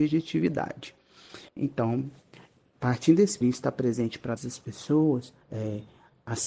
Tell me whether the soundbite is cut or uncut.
cut